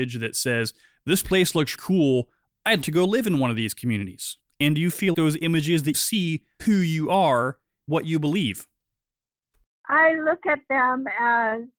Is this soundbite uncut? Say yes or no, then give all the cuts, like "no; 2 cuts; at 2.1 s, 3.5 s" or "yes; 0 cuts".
no; 6 cuts; at 1.7 s, 2.8 s, 5.1 s, 5.9 s, 6.6 s, 7.9 s